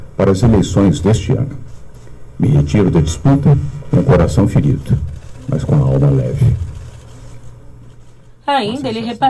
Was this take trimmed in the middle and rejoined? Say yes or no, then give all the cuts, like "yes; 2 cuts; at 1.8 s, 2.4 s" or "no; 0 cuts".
no; 0 cuts